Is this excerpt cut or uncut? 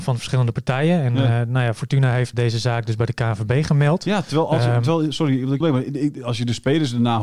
cut